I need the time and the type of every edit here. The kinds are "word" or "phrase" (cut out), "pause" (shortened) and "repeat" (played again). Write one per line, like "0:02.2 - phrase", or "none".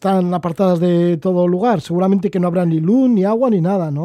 none